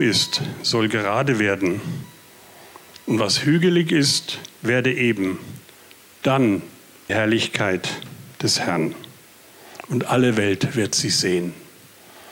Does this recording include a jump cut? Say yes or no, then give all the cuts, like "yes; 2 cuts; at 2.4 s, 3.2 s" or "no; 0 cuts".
yes; 2 cuts; at 4.5 s, 7.1 s